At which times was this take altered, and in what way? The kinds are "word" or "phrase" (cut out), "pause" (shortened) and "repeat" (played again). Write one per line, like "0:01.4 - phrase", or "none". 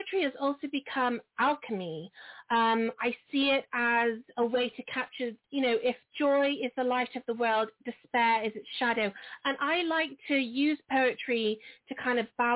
0:05.4 - pause